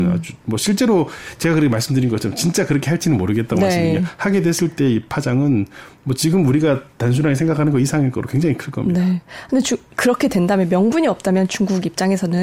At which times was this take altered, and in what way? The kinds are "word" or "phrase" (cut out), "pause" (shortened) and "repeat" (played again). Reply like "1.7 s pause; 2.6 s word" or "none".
9.9 s phrase